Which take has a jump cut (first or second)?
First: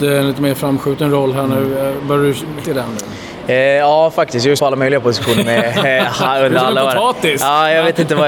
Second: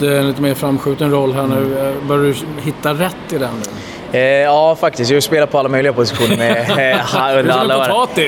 first